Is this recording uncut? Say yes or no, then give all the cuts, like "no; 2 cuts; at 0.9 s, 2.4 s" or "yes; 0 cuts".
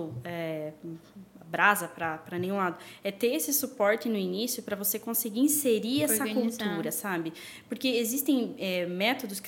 yes; 0 cuts